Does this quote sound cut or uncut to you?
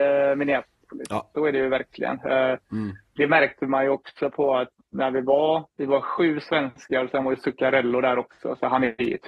cut